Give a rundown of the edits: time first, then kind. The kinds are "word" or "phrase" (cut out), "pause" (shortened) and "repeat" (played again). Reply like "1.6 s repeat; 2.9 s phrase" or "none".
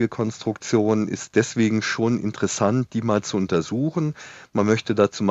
none